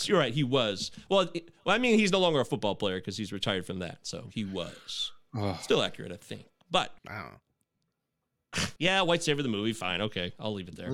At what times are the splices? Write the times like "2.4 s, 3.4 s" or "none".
7.0 s, 8.8 s